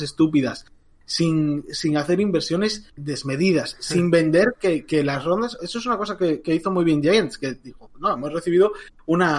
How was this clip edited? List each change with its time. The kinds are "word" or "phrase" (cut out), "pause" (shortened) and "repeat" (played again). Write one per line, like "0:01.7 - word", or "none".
0:03.0 - word